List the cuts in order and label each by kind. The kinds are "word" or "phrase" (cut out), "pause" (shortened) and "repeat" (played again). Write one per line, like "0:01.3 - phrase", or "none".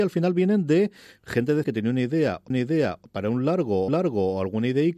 0:01.6 - word
0:02.5 - repeat
0:03.9 - repeat